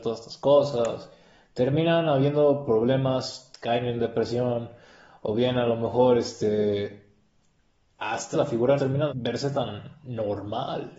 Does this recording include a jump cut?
yes; 3 cuts; at 8.3 s, 8.8 s, 9.1 s

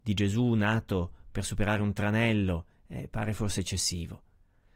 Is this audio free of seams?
yes; 0 cuts

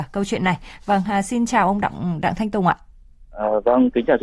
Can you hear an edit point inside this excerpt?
no; 0 cuts

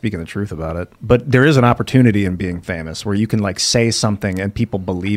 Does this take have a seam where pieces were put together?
no; 0 cuts

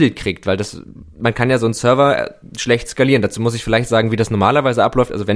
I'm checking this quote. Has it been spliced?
yes; 1 cut; at 1.1 s

